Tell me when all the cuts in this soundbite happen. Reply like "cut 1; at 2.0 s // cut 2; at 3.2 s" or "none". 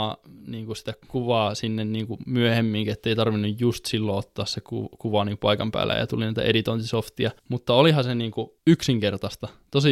cut 1; at 1.0 s // cut 2; at 7.4 s // cut 3; at 8.6 s